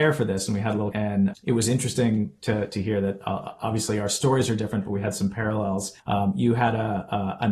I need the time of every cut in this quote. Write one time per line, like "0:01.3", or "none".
0:00.9
0:01.3
0:06.0